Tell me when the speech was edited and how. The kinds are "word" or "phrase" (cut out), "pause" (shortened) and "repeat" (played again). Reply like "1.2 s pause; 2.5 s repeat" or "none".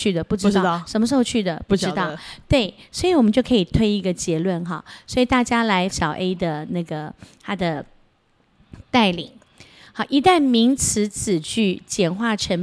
5.9 s word